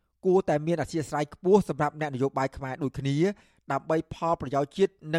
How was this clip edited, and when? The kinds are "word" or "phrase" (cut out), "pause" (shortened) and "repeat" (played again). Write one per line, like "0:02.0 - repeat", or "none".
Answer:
none